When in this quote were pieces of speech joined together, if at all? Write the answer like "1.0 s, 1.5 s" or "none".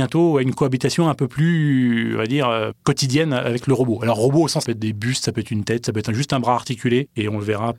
4.7 s